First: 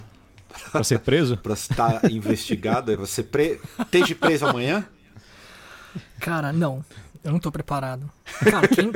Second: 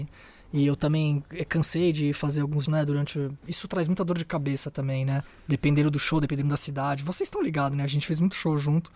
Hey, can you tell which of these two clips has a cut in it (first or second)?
second